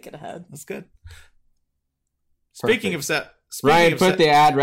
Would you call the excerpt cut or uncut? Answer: cut